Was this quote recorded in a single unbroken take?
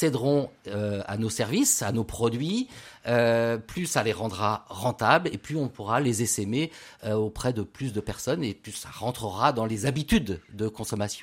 yes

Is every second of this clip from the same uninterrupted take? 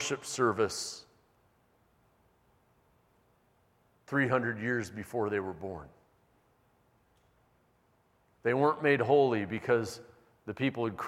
yes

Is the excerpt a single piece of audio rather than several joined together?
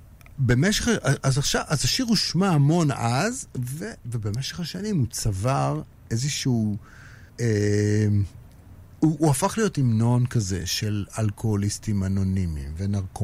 no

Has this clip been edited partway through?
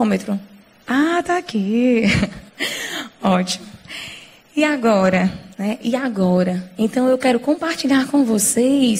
yes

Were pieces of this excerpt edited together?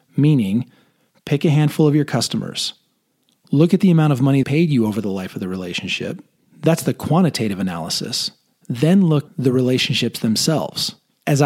yes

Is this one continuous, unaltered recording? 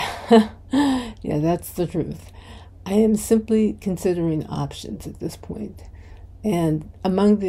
yes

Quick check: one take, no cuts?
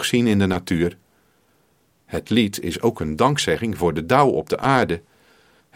yes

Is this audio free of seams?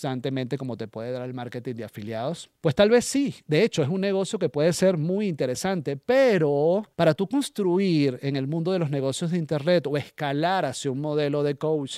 no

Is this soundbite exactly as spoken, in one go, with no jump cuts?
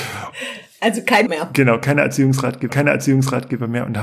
no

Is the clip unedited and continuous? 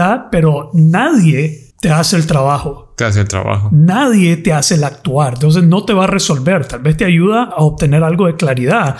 no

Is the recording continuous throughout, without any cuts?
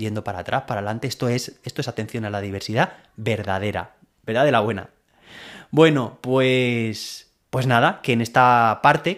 yes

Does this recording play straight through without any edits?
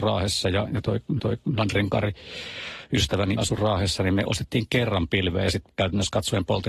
no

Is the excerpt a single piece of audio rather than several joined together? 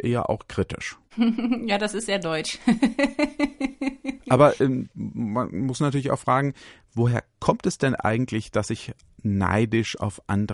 yes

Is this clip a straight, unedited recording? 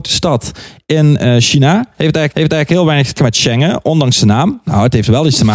no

